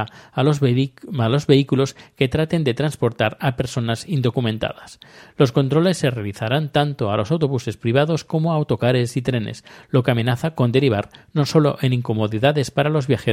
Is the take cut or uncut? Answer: uncut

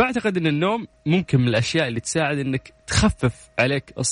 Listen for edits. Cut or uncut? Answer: cut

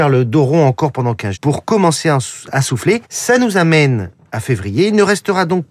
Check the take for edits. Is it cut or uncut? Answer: cut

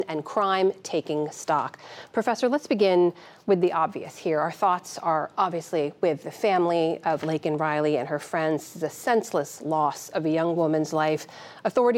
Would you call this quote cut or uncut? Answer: uncut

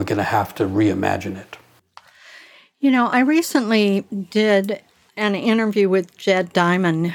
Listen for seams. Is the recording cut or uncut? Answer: uncut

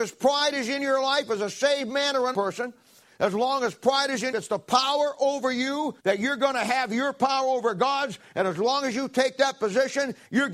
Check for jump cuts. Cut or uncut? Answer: cut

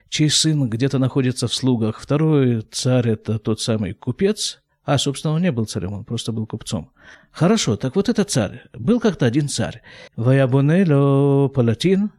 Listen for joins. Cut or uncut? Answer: cut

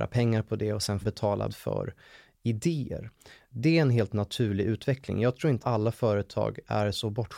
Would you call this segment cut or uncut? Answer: cut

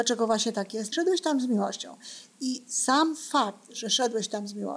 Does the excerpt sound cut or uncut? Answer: cut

